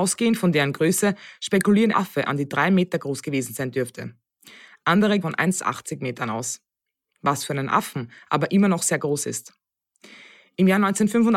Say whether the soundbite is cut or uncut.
cut